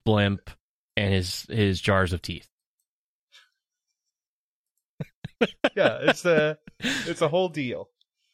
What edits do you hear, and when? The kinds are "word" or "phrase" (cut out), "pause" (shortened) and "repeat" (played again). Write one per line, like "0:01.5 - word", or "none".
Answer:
none